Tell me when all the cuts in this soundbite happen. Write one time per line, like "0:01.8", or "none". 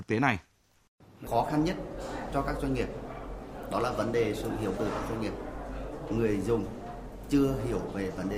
0:04.7